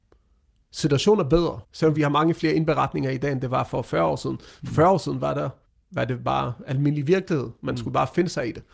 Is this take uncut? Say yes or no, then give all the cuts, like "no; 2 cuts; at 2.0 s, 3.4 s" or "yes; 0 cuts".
no; 2 cuts; at 1.6 s, 5.6 s